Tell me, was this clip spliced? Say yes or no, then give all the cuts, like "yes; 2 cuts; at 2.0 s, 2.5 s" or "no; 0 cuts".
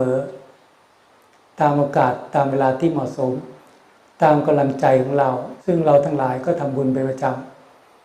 yes; 1 cut; at 5.6 s